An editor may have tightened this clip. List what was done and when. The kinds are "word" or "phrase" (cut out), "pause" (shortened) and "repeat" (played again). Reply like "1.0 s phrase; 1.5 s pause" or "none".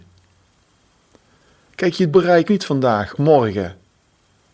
2.1 s word; 2.5 s word; 3.2 s word